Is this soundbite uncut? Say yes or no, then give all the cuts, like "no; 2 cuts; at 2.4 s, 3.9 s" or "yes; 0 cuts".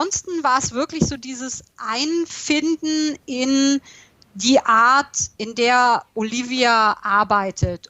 yes; 0 cuts